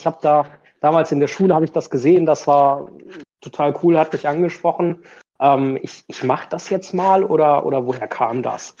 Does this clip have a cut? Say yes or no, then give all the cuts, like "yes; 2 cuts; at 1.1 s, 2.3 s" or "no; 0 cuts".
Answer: no; 0 cuts